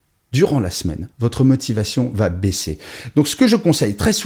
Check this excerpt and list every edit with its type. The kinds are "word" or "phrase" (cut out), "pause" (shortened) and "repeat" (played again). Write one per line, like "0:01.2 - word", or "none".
0:01.1 - pause